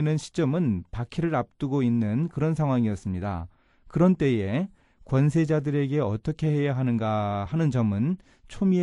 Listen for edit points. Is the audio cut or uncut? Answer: uncut